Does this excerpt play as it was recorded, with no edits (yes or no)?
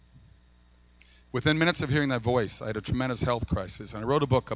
yes